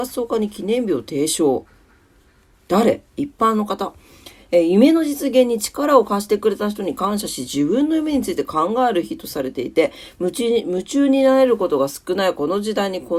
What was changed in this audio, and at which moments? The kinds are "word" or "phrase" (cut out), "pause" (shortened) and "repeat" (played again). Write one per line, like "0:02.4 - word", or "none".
0:03.1 - pause